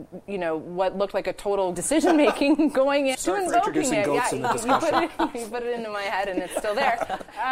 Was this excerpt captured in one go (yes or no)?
no